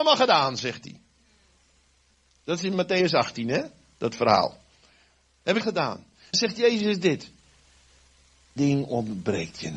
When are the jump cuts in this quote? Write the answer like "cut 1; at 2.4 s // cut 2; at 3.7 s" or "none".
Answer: cut 1; at 5.6 s // cut 2; at 6.3 s // cut 3; at 8.6 s